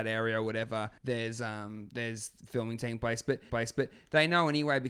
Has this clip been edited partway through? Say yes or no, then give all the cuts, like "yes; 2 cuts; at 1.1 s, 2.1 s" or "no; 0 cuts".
yes; 2 cuts; at 1.0 s, 3.5 s